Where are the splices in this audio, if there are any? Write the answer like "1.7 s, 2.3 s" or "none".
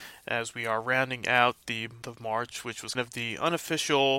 2.0 s, 2.9 s